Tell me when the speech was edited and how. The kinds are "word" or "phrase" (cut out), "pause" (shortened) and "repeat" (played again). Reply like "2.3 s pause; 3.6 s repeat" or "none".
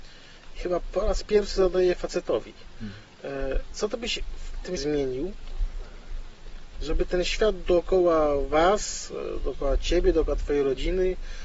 4.8 s word